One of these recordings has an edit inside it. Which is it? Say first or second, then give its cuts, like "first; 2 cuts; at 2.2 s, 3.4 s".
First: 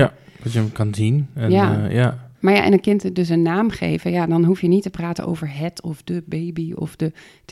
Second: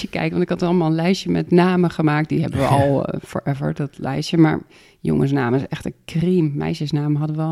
first; 1 cut; at 2.3 s